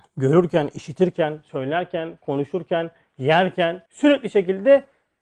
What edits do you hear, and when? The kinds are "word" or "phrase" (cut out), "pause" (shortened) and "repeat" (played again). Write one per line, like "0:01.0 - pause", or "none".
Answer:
0:03.9 - pause